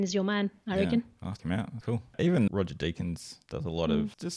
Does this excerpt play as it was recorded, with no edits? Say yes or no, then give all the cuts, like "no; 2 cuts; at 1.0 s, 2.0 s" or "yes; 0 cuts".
no; 3 cuts; at 1.4 s, 1.8 s, 2.5 s